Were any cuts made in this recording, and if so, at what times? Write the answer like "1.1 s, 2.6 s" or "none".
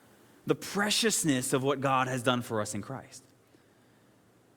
none